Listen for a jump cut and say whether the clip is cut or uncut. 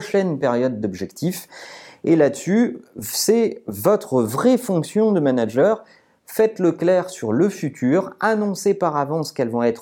uncut